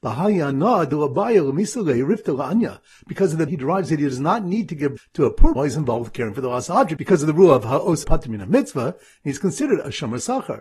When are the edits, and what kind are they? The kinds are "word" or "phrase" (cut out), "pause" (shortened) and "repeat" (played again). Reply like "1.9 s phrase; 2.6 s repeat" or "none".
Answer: 3.5 s word; 5.0 s word; 5.6 s word; 8.0 s word